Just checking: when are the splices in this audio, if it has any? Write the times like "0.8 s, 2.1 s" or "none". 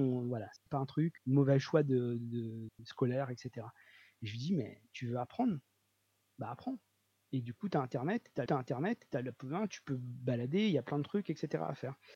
1.2 s, 8.5 s